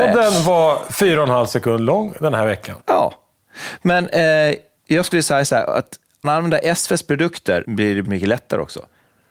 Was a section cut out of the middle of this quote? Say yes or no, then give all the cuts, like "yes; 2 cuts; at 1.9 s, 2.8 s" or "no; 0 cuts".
yes; 6 cuts; at 2.8 s, 4.8 s, 5.1 s, 6.2 s, 7.6 s, 8.0 s